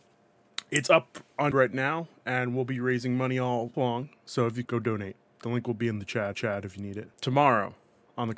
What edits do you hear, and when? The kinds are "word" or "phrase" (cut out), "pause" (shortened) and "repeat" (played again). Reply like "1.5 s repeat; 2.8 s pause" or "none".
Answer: 1.5 s word; 3.7 s word; 4.6 s word; 6.3 s repeat; 7.1 s pause